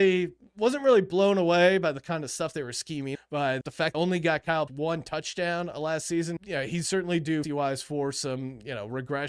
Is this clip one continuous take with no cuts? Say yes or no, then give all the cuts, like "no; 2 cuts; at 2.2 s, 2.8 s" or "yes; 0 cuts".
no; 6 cuts; at 3.1 s, 3.6 s, 3.9 s, 4.7 s, 6.4 s, 7.4 s